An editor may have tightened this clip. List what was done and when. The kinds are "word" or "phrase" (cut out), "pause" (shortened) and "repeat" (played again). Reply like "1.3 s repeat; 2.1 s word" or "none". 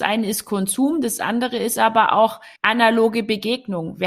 2.6 s pause